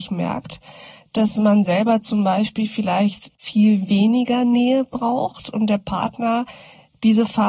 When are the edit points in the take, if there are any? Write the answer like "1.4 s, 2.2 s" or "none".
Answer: none